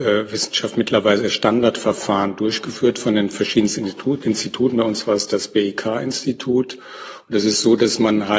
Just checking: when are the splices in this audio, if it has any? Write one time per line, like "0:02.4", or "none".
0:04.2
0:05.3